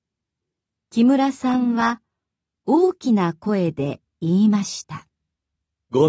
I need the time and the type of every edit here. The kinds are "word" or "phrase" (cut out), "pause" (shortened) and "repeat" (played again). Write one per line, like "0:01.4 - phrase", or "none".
none